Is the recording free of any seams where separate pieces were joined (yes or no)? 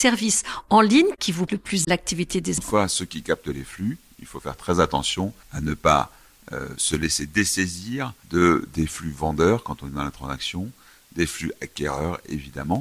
no